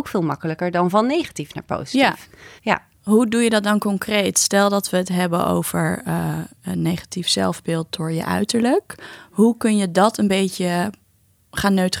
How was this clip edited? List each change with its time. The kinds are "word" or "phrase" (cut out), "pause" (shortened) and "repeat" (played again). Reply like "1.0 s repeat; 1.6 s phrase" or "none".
2.6 s pause

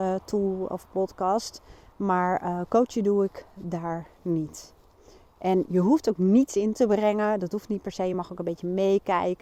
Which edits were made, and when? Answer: none

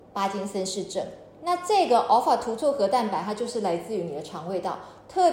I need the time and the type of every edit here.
none

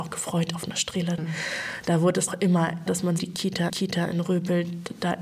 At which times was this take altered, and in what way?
2.3 s phrase; 2.9 s word; 3.2 s phrase; 3.7 s repeat

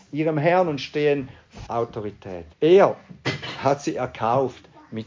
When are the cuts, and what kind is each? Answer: 1.7 s phrase; 2.5 s pause

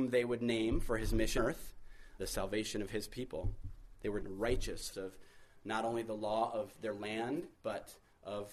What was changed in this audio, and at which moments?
1.4 s word; 2.2 s word; 4.2 s word; 4.9 s word; 7.5 s pause

